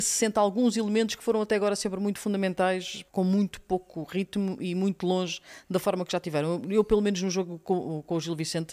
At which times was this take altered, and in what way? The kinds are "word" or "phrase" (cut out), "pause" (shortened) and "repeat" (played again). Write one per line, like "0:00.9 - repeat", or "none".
0:03.1 - pause